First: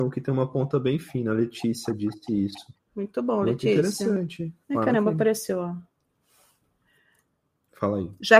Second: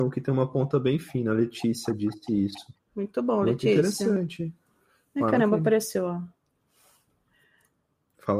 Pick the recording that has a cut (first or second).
first